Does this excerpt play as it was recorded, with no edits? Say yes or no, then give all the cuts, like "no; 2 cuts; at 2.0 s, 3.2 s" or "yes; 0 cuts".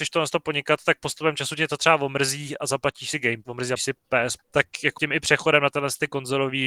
no; 4 cuts; at 3.4 s, 3.8 s, 4.4 s, 5.0 s